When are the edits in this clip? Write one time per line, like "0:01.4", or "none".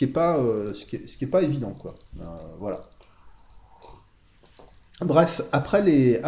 none